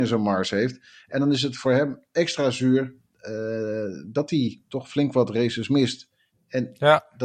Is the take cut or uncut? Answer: uncut